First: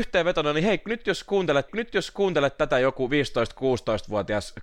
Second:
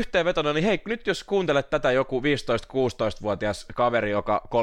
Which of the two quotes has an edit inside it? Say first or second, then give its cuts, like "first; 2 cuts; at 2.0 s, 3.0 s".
first; 1 cut; at 1.7 s